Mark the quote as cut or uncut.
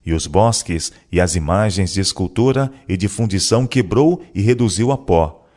uncut